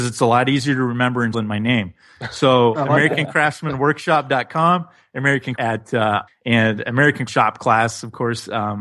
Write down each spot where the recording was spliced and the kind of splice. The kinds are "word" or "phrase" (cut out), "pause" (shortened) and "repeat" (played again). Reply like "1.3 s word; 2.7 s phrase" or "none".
1.3 s word; 5.6 s phrase; 6.3 s word; 7.3 s word